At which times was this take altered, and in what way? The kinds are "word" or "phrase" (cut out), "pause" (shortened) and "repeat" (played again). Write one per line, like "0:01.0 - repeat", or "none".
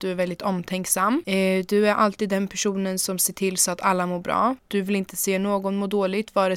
none

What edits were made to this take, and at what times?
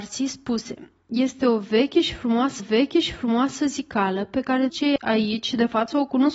0:02.6 - repeat
0:04.7 - word

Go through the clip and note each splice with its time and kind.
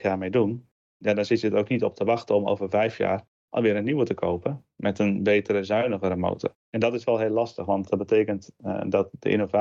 none

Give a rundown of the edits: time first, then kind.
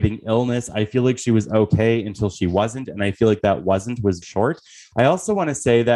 0:04.2 - word

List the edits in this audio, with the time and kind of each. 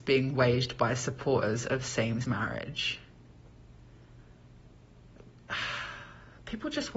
0:02.2 - word

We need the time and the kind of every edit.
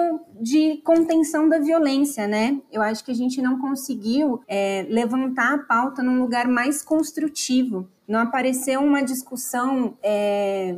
0:04.4 - pause
0:08.0 - pause

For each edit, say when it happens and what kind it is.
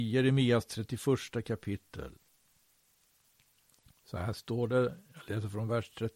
none

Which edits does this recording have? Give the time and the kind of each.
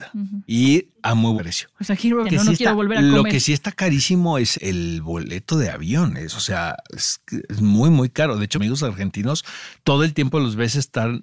0:01.4 - word
0:02.2 - word
0:04.5 - word
0:08.5 - word

